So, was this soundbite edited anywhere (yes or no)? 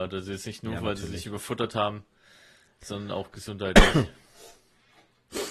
no